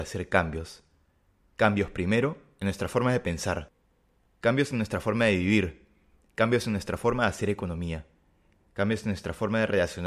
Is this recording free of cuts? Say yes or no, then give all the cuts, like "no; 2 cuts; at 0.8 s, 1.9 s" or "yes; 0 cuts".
yes; 0 cuts